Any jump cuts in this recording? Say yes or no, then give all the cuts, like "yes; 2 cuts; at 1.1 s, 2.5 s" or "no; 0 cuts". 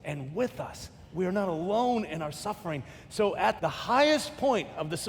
yes; 1 cut; at 3.6 s